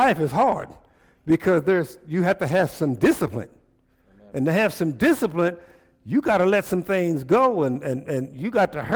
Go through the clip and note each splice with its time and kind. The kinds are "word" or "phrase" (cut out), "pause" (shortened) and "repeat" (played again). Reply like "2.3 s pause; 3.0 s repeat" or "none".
none